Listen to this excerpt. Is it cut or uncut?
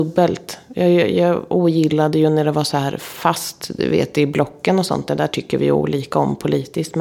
uncut